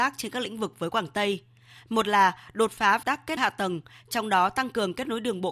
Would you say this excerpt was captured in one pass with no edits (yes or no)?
no